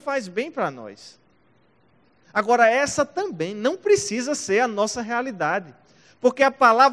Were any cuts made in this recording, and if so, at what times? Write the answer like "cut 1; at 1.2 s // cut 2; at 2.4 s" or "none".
none